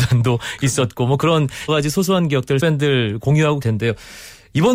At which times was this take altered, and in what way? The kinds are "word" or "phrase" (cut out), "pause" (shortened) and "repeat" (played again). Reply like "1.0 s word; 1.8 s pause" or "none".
1.7 s word; 2.6 s word; 3.6 s word